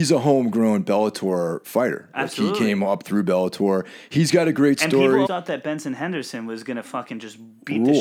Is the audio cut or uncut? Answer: cut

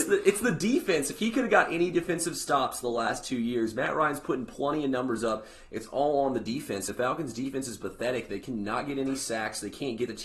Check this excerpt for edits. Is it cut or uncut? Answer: cut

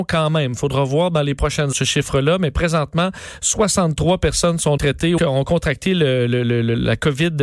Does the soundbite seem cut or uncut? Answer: cut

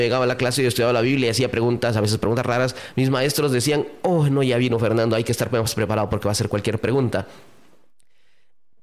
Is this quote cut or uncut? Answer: uncut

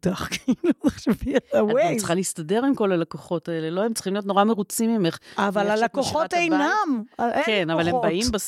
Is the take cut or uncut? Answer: uncut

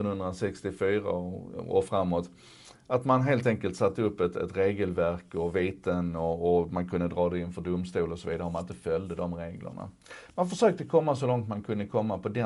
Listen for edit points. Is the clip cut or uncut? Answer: uncut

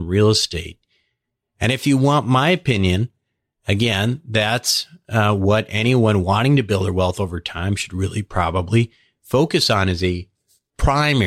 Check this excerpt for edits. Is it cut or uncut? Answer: uncut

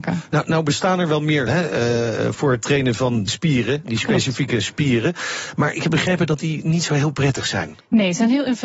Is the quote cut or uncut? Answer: cut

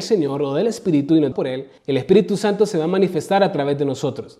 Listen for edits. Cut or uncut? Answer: cut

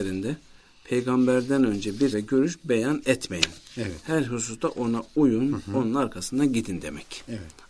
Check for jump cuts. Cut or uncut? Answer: cut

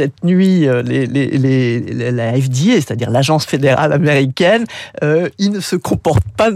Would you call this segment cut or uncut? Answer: uncut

